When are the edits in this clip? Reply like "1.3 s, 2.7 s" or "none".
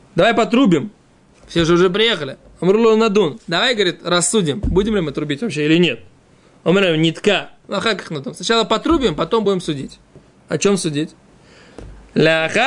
none